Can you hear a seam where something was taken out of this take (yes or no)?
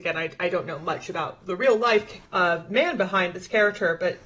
yes